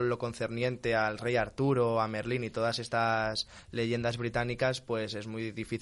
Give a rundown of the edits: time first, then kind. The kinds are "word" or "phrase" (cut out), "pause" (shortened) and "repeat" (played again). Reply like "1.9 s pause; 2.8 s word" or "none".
none